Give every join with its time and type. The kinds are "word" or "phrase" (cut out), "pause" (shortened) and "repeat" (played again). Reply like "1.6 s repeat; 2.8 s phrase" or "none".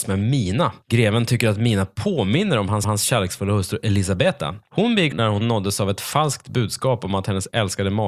2.8 s repeat; 5.1 s word

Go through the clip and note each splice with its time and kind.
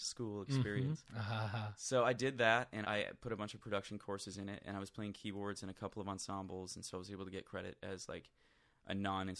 2.8 s word

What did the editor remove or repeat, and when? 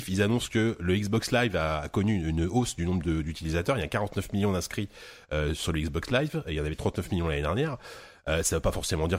none

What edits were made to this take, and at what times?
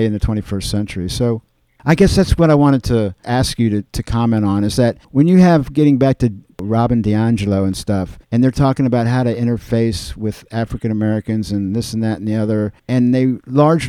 5.0 s pause; 8.2 s pause; 12.8 s pause

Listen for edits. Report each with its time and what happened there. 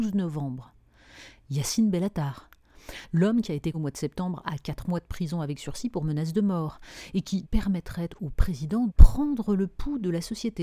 3.7 s word; 7.4 s word; 8.9 s word

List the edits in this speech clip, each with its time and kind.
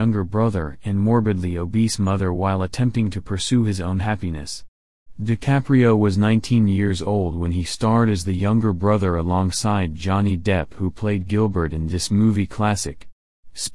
none

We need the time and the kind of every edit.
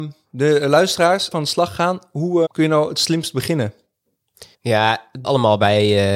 1.3 s word; 2.5 s word; 4.5 s pause; 5.2 s word

